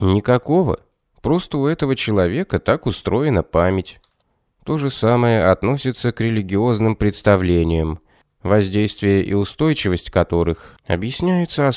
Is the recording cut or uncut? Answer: uncut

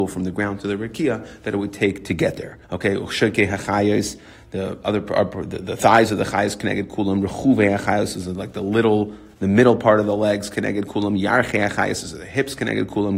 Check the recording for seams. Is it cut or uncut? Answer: cut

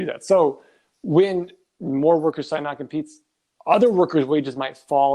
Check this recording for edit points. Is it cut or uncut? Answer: uncut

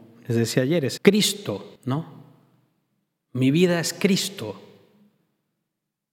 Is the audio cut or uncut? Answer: cut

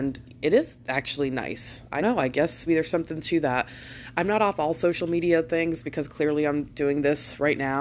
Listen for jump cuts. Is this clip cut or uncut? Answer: cut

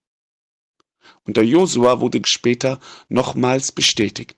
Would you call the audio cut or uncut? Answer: cut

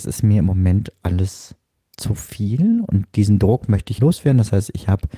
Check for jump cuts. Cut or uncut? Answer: cut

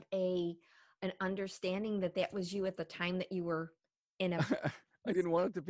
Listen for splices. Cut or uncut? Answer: uncut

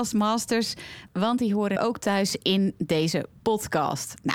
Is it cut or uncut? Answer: cut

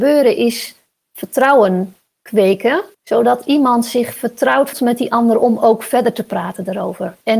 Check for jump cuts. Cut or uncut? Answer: cut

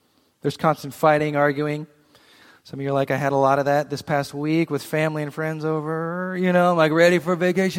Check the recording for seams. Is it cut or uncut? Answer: uncut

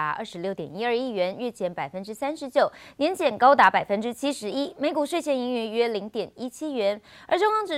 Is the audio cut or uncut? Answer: uncut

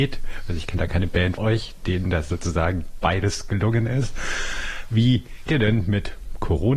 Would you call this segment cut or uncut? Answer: cut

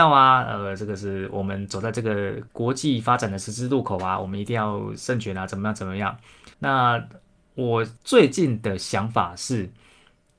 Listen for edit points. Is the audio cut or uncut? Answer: cut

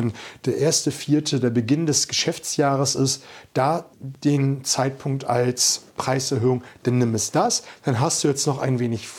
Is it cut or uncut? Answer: cut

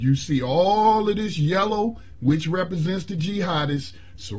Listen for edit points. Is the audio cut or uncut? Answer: uncut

